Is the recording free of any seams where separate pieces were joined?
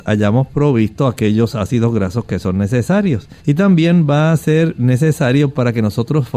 no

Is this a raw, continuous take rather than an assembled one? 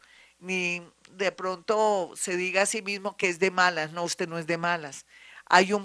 yes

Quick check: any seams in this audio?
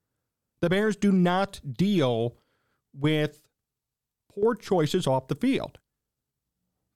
no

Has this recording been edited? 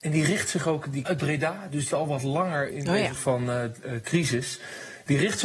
yes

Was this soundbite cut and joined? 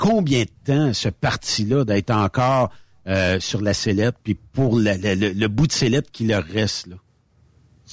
no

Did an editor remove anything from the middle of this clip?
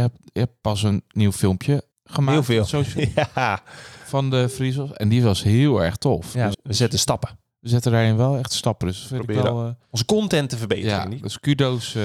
yes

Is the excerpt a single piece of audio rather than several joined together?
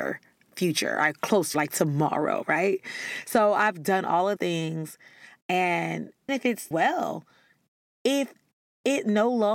no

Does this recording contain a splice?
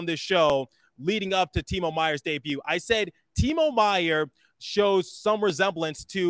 no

